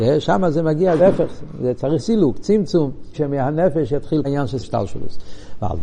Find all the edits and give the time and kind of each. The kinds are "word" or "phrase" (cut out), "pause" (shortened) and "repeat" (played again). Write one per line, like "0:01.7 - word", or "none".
0:01.0 - word
0:02.0 - word
0:03.1 - word
0:04.2 - word
0:04.6 - word